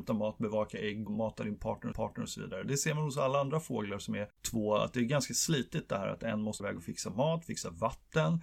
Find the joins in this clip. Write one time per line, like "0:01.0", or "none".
0:01.1
0:01.9
0:04.3
0:06.6